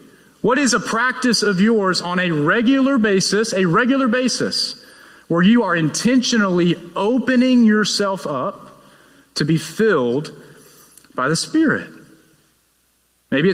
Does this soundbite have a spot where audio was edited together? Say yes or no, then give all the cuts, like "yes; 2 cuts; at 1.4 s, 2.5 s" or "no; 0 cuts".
no; 0 cuts